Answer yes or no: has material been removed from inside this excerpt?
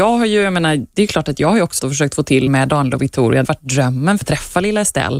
yes